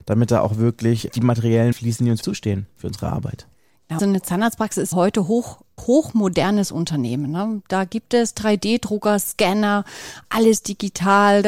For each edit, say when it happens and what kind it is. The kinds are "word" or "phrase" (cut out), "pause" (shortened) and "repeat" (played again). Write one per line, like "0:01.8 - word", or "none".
0:01.1 - word
0:01.7 - word
0:02.2 - word
0:04.0 - word
0:04.9 - word
0:05.8 - word